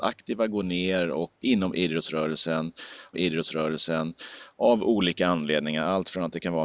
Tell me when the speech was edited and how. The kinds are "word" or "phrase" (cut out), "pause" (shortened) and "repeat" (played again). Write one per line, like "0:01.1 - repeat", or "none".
0:01.4 - word
0:03.1 - repeat

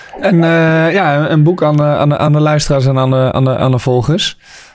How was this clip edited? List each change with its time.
none

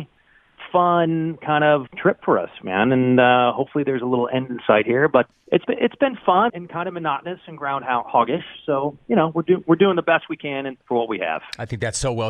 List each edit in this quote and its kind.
0:01.9 - word
0:05.3 - word
0:06.5 - word
0:10.8 - pause

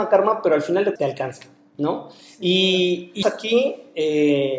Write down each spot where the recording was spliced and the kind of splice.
0:01.0 - word
0:03.2 - word

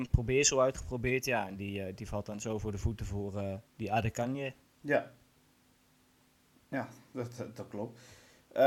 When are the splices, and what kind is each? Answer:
0:03.7 - pause
0:04.7 - pause

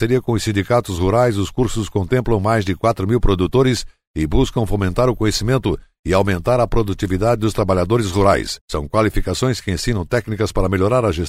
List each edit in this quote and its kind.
none

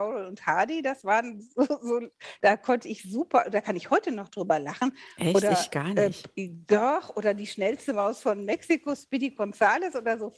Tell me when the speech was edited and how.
none

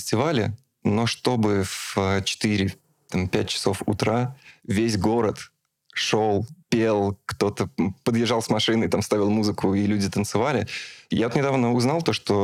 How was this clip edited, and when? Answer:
0:06.6 - pause

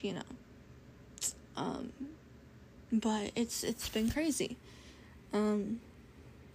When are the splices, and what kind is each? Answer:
none

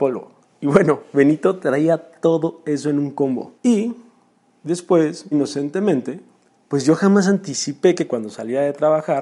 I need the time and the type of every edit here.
0:03.6 - pause
0:05.3 - word

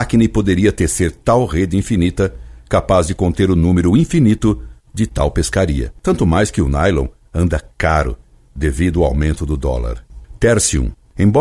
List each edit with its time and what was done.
none

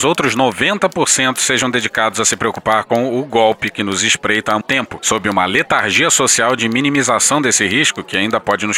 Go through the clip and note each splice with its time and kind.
0:04.6 - word

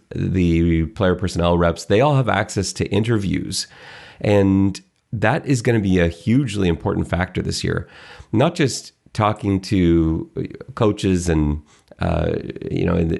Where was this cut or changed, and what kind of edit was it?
none

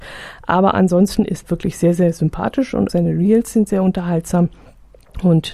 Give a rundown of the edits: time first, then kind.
0:01.4 - word
0:02.9 - word

